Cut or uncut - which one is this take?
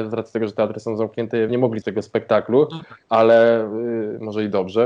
cut